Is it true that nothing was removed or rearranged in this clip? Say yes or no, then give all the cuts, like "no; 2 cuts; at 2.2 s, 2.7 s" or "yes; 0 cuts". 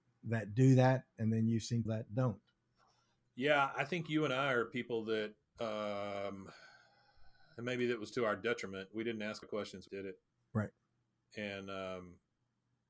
no; 3 cuts; at 1.9 s, 9.4 s, 9.9 s